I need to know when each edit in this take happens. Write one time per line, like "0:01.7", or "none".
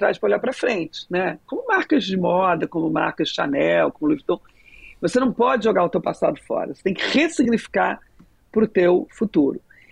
none